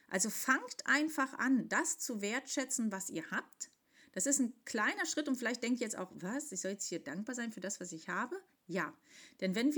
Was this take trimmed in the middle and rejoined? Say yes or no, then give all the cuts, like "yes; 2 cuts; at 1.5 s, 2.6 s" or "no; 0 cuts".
no; 0 cuts